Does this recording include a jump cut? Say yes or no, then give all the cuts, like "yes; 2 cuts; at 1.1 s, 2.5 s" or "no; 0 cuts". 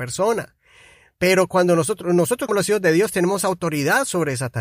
yes; 1 cut; at 2.5 s